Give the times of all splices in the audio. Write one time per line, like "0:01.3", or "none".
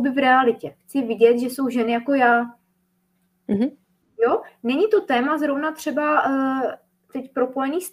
none